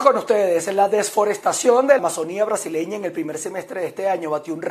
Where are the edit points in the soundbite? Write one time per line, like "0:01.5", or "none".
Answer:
0:02.0